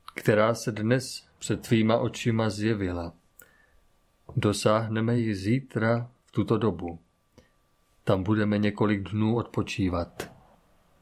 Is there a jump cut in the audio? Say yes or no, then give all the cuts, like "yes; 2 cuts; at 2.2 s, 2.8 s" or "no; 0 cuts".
no; 0 cuts